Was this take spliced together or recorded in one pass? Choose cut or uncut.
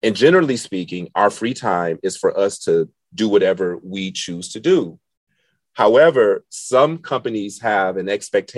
uncut